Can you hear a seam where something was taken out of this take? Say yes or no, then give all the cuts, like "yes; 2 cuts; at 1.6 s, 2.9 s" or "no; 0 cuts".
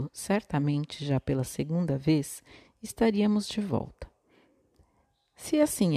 no; 0 cuts